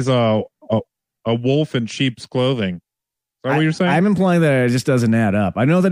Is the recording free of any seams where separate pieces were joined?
yes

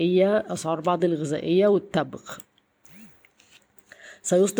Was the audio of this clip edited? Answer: yes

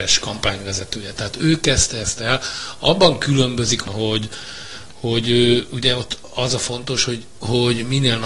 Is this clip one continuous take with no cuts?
yes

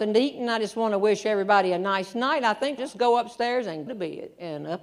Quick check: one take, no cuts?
no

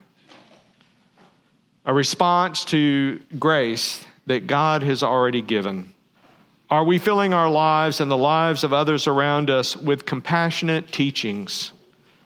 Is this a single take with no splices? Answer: no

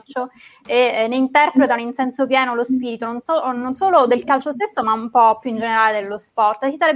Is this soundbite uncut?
yes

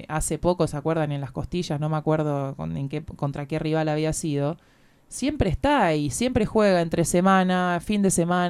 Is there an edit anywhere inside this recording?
no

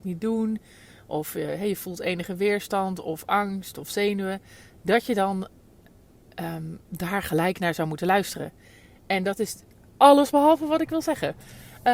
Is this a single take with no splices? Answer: yes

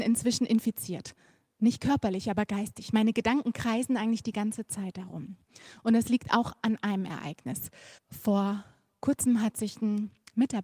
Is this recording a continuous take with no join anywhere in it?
no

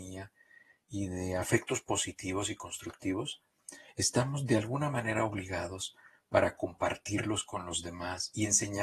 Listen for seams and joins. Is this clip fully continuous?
yes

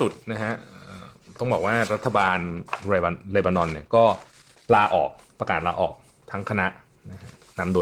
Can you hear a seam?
no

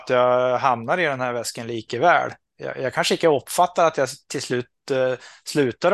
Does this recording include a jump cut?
no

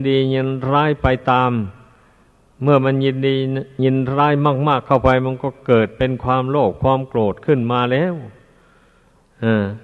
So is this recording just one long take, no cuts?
yes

